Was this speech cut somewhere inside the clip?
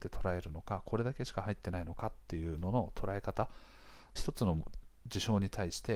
yes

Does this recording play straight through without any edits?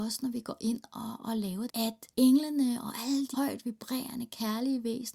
no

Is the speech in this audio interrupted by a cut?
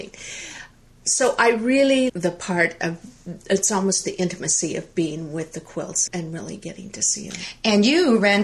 yes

